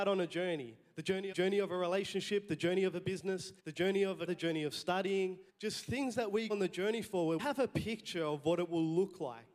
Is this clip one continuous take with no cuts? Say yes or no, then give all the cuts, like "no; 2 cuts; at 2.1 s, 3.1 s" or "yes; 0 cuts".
no; 6 cuts; at 1.3 s, 3.6 s, 4.3 s, 5.5 s, 6.5 s, 7.4 s